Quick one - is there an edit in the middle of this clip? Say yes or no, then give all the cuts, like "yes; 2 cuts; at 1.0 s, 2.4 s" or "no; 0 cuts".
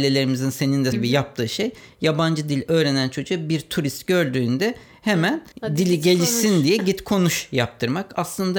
yes; 2 cuts; at 0.9 s, 5.5 s